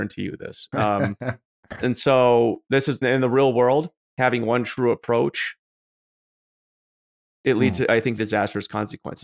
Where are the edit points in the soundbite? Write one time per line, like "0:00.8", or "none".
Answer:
0:03.0
0:08.2